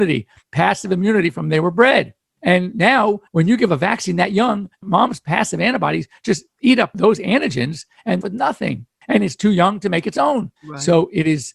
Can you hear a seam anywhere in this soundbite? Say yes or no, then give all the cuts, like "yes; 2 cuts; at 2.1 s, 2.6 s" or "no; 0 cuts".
yes; 3 cuts; at 3.3 s, 8.2 s, 10.6 s